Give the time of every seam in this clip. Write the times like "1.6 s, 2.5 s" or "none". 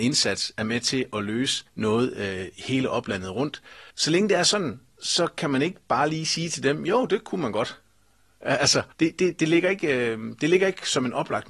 1.7 s, 3.9 s, 8.9 s